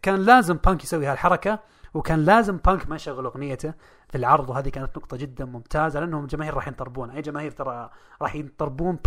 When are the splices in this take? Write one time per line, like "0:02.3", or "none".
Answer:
none